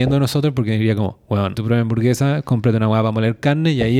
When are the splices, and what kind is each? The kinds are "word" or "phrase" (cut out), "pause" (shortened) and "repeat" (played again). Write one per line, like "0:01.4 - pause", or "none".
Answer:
0:01.5 - word